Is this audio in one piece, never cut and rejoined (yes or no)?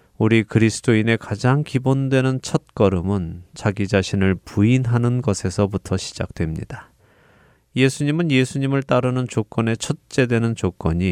yes